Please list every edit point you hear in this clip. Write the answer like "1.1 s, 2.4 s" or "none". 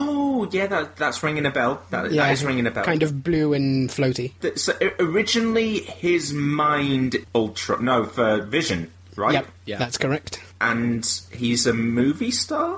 7.2 s, 9.6 s

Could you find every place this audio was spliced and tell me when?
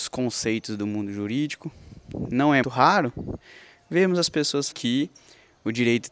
2.6 s, 4.7 s

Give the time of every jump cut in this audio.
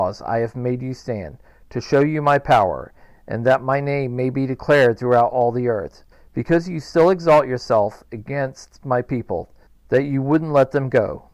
none

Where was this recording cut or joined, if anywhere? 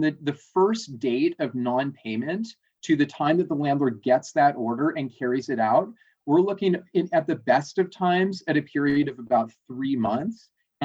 none

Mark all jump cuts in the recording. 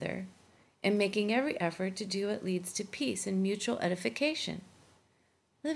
none

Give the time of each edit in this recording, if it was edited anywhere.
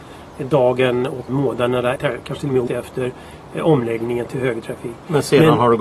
1.3 s, 2.0 s, 2.7 s

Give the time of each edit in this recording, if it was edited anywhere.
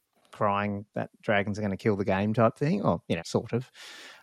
1.1 s, 3.2 s

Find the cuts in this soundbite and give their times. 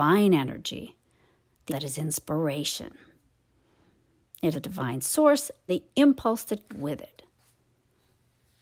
1.7 s, 4.5 s, 5.7 s, 6.7 s

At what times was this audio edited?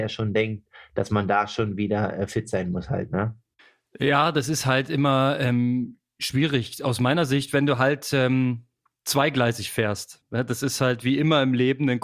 none

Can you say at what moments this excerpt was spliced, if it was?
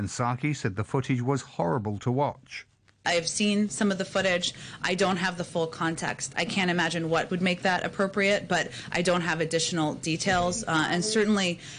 7.3 s

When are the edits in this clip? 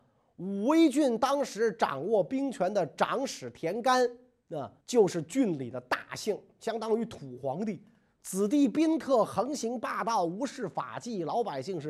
4.8 s

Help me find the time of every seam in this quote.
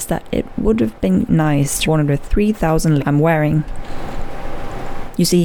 1.3 s, 1.8 s, 3.0 s

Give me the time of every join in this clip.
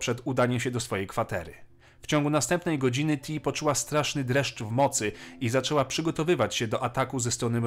none

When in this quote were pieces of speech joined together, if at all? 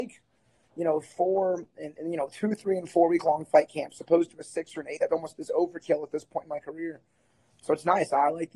5.0 s

